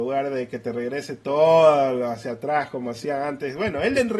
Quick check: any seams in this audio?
no; 0 cuts

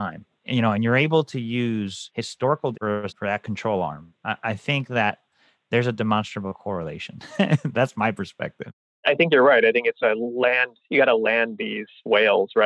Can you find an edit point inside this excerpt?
yes; 3 cuts; at 2.7 s, 3.1 s, 10.0 s

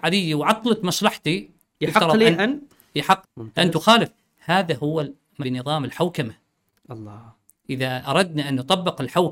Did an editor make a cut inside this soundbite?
yes; 2 cuts; at 3.2 s, 5.4 s

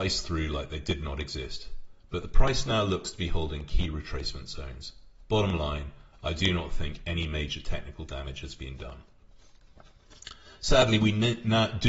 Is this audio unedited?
no; 1 cut; at 10.5 s

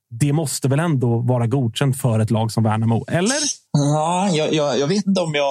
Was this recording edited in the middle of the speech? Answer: yes; 1 cut; at 3.7 s

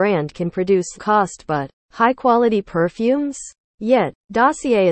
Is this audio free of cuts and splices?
no; 2 cuts; at 1.0 s, 1.8 s

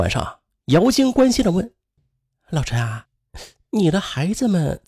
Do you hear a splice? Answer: no; 0 cuts

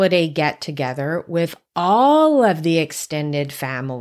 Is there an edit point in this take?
no; 0 cuts

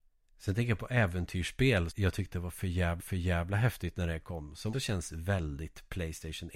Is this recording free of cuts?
no; 3 cuts; at 1.9 s, 3.0 s, 4.7 s

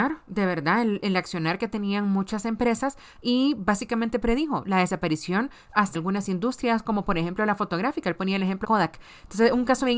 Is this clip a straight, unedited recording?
no; 2 cuts; at 5.9 s, 8.6 s

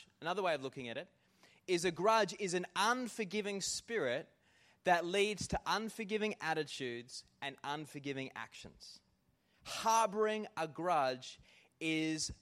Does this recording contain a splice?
no; 0 cuts

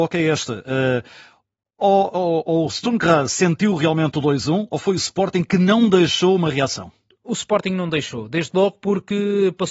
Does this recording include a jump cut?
no; 0 cuts

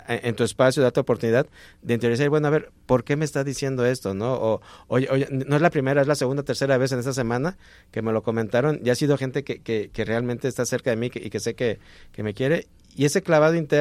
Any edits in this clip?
no; 0 cuts

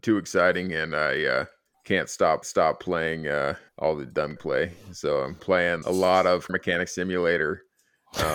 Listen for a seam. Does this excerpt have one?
yes; 7 cuts; at 1.7 s, 2.4 s, 3.7 s, 4.4 s, 5.4 s, 5.8 s, 6.5 s

